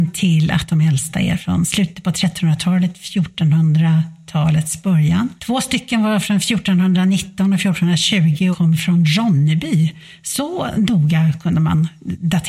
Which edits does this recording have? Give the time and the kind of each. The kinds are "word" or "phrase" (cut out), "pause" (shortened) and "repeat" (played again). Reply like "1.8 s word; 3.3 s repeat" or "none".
5.4 s pause; 8.5 s word